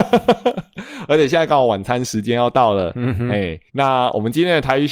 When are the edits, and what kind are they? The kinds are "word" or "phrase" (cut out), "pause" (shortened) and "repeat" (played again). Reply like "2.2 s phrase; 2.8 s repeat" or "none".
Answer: 3.7 s pause